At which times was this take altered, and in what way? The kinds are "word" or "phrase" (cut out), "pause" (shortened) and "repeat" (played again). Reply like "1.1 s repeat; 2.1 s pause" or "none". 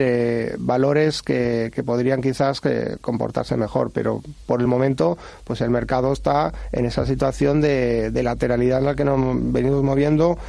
none